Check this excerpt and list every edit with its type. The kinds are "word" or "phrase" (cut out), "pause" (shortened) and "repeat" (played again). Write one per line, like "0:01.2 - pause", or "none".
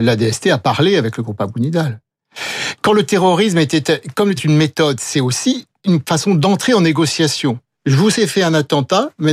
0:04.4 - word